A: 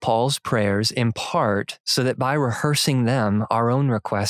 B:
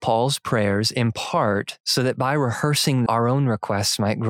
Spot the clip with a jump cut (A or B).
B